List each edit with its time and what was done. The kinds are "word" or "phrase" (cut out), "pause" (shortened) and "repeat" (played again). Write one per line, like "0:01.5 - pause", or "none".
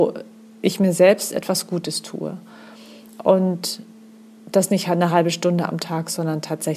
none